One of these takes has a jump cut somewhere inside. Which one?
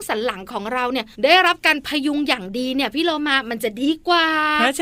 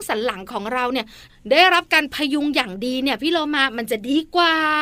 first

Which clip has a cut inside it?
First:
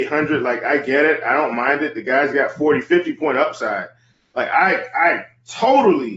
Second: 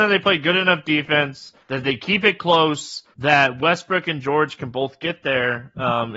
second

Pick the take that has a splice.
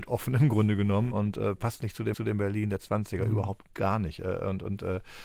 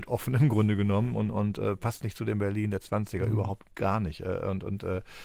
first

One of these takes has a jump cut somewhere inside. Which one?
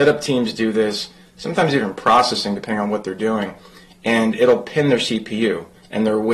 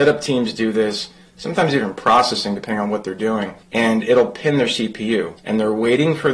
second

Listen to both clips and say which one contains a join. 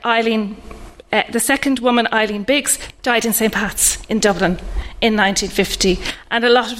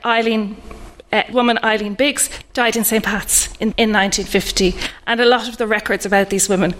second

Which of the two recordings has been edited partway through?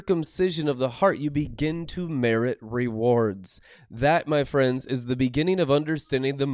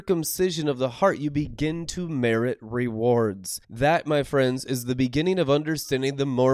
second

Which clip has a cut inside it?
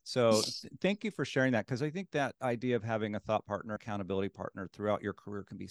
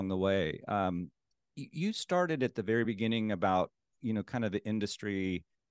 first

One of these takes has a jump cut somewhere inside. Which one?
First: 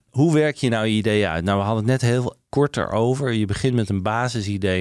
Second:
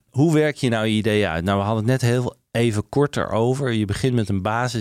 first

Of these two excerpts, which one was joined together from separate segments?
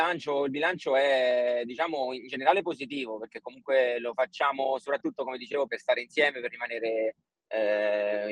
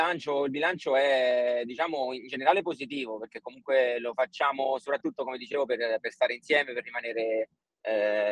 first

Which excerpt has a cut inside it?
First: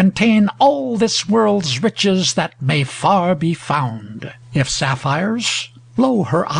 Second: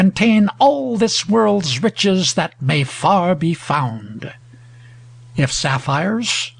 first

